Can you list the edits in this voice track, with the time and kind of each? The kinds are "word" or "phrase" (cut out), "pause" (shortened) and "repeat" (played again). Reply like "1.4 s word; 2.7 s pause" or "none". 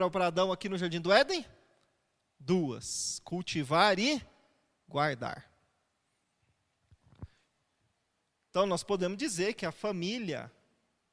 none